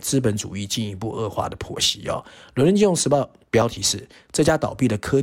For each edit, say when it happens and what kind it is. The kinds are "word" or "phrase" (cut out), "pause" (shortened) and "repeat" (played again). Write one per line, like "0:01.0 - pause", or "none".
none

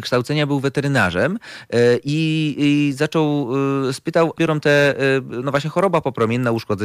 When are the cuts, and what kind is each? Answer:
0:04.4 - phrase

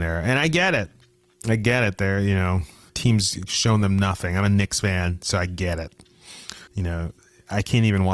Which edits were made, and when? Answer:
0:02.9 - word
0:06.7 - pause

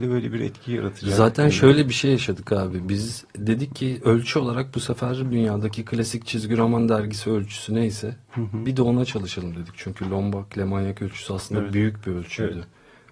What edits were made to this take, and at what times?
0:05.3 - word

